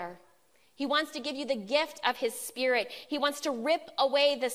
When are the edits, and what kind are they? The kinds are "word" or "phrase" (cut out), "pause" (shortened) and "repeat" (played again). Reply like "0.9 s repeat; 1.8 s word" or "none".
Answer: none